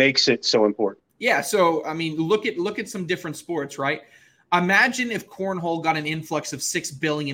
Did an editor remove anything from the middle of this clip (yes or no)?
yes